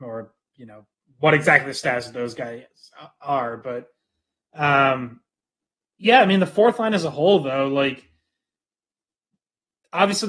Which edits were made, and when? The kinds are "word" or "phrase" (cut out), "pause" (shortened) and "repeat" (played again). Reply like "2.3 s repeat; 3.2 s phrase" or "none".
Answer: none

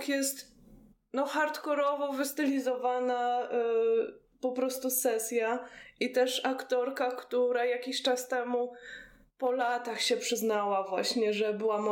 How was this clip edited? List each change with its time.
0.9 s pause

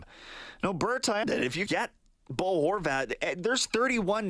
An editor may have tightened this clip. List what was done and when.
1.2 s word; 1.7 s word

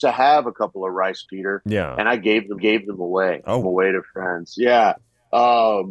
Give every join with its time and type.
1.3 s word; 2.6 s repeat; 3.6 s phrase

